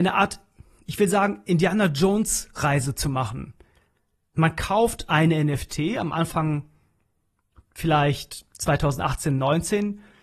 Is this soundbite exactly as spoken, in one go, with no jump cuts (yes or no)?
yes